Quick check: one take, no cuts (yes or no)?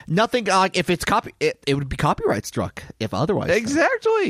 yes